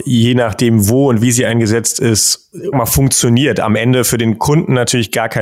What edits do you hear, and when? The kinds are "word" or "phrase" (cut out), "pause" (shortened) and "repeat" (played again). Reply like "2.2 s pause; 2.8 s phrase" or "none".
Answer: 2.7 s phrase